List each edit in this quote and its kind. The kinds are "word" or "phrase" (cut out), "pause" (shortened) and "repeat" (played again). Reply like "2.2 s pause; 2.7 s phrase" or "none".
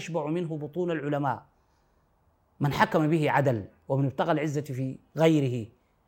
none

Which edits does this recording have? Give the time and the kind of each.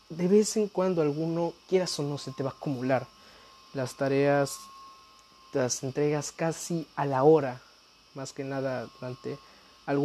none

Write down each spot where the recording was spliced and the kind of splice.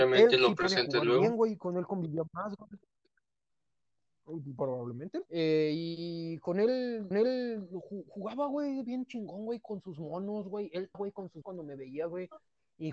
5.3 s pause; 7.1 s repeat; 10.9 s word; 11.4 s word

